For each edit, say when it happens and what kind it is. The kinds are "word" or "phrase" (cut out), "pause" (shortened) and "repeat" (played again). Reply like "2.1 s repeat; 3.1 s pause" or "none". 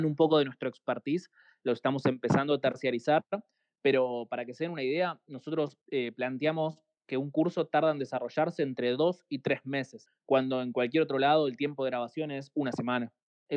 5.8 s pause